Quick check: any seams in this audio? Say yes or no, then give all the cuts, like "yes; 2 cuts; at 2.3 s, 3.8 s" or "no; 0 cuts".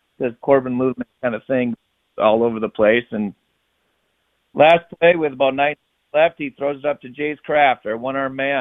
no; 0 cuts